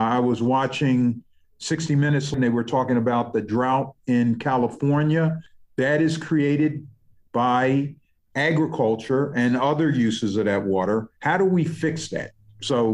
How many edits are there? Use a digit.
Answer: 0